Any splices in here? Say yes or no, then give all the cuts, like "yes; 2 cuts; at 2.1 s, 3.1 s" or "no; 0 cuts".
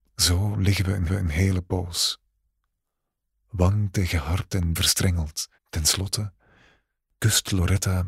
yes; 3 cuts; at 1.1 s, 4.8 s, 5.6 s